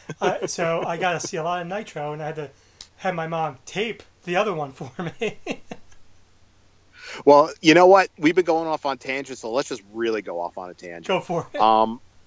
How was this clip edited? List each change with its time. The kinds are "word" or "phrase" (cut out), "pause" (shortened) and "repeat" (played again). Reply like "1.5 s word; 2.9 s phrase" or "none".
2.9 s pause; 4.1 s pause